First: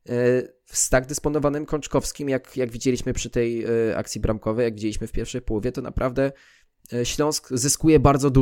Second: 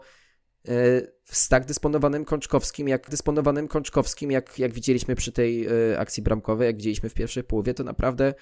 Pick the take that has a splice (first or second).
second